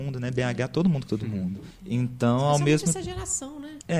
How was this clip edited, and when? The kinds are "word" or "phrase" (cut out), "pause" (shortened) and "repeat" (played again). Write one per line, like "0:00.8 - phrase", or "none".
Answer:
0:01.1 - word